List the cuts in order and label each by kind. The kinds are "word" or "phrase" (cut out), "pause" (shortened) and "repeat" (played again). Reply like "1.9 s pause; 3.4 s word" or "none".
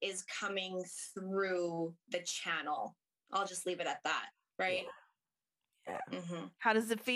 none